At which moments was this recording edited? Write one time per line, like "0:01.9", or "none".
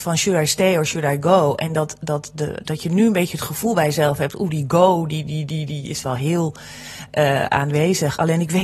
none